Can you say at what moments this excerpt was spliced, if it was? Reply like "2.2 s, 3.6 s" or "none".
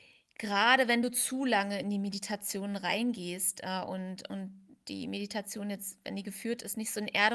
none

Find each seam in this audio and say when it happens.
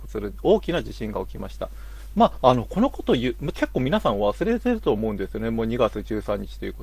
3.5 s

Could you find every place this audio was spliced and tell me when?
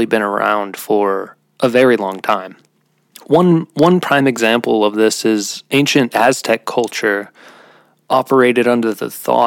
none

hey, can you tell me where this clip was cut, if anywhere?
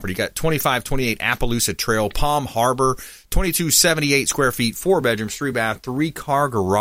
none

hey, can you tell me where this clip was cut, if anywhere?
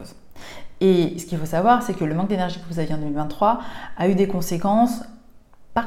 none

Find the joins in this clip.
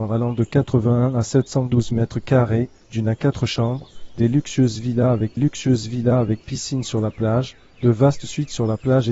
5.4 s

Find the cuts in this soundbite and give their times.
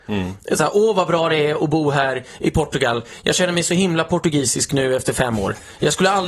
none

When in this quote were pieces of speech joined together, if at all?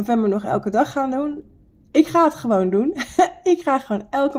none

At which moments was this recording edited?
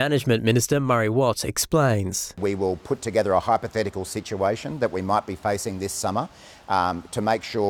none

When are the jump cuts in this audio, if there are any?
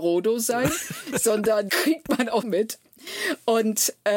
1.7 s, 2.4 s

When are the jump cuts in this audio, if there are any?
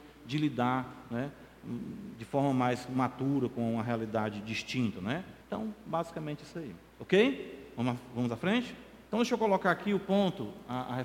5.4 s, 6.9 s, 9.1 s

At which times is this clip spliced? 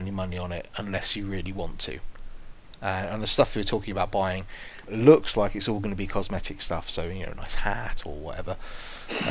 4.8 s

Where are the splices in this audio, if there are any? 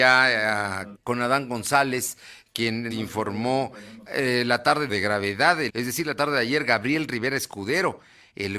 0.9 s, 2.9 s, 4.1 s, 4.9 s, 5.7 s

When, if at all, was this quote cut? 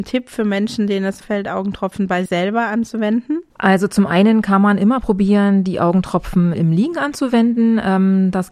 1.2 s, 2.3 s, 3.5 s, 6.5 s

